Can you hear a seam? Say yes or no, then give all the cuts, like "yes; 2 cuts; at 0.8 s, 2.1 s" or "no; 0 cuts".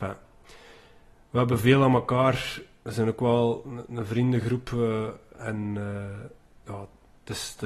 no; 0 cuts